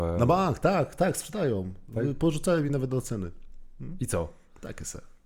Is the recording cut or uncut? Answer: uncut